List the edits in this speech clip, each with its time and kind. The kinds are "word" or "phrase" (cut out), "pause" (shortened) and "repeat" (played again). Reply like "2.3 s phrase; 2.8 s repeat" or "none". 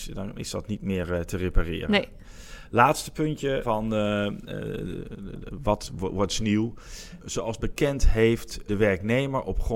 none